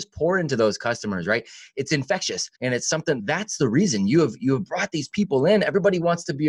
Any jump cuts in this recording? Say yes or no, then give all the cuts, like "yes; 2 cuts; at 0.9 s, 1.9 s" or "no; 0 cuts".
yes; 2 cuts; at 2.5 s, 3.2 s